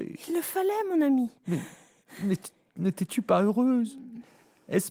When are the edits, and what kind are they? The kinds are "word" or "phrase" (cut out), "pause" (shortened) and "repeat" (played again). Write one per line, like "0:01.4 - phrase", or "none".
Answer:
none